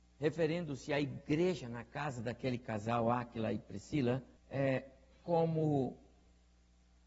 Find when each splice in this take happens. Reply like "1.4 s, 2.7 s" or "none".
4.4 s